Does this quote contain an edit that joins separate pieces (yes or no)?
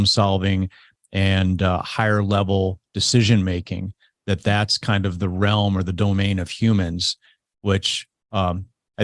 no